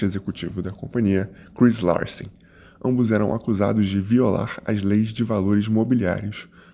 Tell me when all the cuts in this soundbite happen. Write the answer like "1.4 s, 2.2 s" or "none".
none